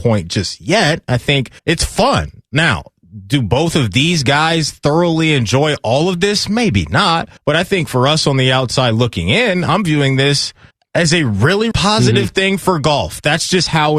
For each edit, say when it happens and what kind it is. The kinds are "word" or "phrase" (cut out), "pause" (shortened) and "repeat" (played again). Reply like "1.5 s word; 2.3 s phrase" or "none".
1.6 s pause; 7.4 s pause; 10.7 s pause; 11.7 s word